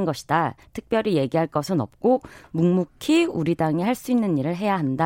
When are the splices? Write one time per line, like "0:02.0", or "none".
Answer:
none